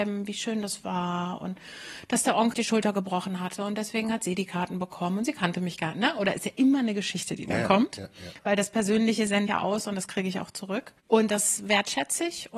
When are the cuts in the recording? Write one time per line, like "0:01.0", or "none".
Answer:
0:02.5
0:09.5
0:11.0